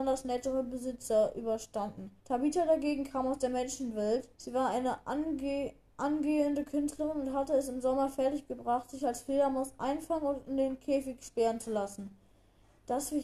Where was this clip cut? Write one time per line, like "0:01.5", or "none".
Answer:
0:02.2
0:04.3
0:05.9

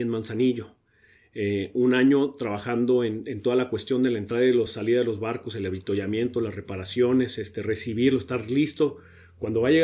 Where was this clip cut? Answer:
none

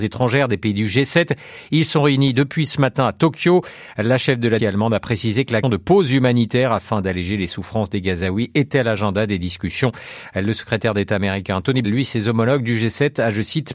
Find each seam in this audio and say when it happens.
0:04.6
0:05.6
0:11.8

